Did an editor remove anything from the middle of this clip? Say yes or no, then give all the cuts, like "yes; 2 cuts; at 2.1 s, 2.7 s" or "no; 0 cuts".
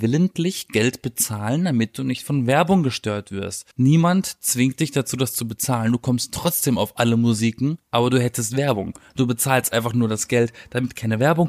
yes; 1 cut; at 3.7 s